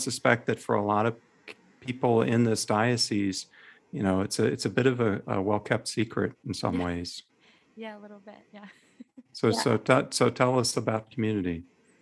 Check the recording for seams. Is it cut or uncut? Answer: uncut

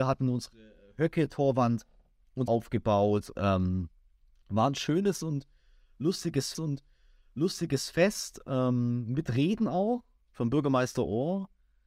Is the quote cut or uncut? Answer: cut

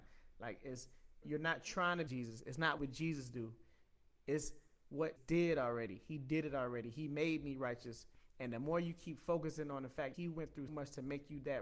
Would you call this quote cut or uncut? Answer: cut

